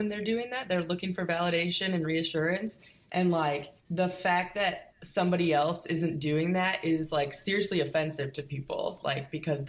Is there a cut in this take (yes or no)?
no